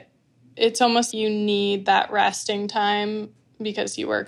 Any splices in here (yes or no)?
yes